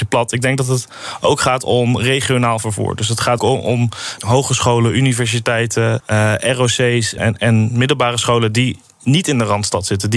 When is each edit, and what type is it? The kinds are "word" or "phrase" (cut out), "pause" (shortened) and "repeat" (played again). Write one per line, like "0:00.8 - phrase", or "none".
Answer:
0:03.4 - word
0:04.2 - word
0:06.0 - word
0:07.2 - word